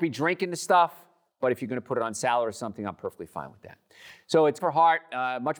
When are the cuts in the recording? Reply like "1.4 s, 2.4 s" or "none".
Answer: 4.6 s